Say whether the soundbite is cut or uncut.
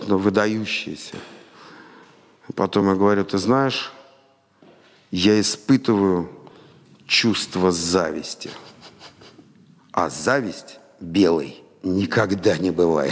uncut